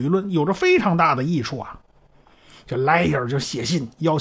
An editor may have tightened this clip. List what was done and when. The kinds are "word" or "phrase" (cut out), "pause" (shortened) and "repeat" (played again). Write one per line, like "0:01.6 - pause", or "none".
none

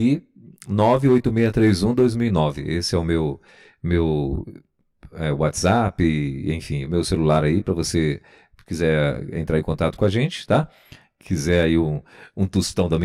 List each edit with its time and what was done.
none

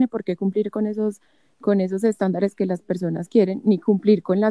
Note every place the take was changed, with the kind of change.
none

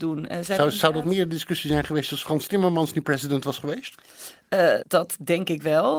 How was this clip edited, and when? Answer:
0:04.8 - word

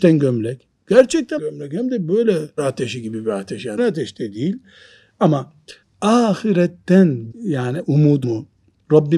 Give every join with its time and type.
0:01.4 - word
0:02.6 - word
0:03.8 - word
0:05.8 - word
0:07.3 - word
0:08.2 - word

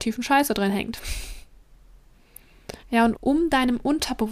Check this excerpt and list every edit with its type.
0:02.8 - pause
0:03.1 - word

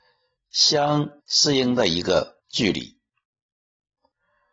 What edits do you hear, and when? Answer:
0:01.2 - pause
0:02.4 - pause

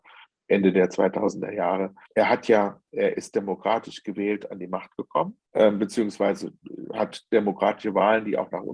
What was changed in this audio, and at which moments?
0:02.0 - pause
0:05.4 - pause

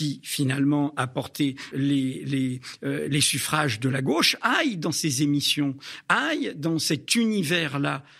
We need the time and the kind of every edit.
0:01.7 - word

